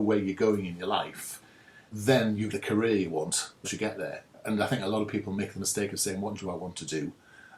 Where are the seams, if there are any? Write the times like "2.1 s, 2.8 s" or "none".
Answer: 1.9 s, 2.5 s, 3.6 s, 6.4 s